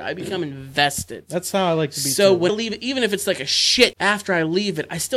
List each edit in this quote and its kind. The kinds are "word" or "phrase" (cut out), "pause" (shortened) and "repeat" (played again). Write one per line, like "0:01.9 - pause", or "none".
0:02.5 - word
0:03.9 - word